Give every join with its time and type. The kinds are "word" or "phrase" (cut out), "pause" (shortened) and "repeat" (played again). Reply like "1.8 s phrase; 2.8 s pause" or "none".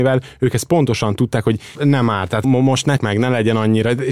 1.7 s word; 2.4 s word; 3.0 s word